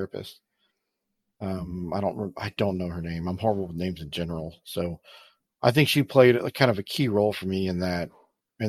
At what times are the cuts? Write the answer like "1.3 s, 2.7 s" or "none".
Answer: none